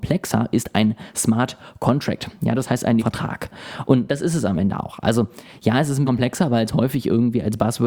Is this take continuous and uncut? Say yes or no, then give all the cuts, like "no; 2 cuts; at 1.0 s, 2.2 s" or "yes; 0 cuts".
no; 2 cuts; at 3.0 s, 6.0 s